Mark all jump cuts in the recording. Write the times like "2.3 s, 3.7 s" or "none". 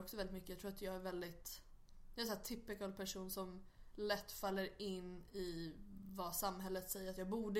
none